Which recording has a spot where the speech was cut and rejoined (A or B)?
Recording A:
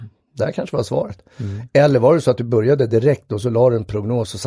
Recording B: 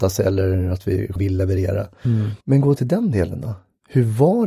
B